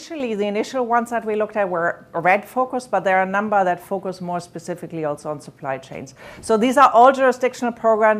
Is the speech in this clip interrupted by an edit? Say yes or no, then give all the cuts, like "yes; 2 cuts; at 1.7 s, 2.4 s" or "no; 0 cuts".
no; 0 cuts